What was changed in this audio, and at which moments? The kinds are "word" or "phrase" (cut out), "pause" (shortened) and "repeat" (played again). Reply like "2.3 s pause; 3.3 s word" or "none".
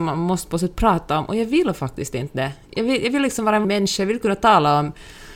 3.6 s word